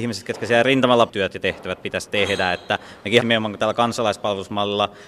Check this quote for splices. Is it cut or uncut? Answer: cut